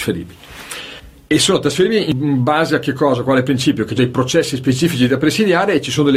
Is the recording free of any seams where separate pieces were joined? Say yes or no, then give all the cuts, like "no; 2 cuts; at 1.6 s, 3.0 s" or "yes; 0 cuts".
no; 1 cut; at 4.0 s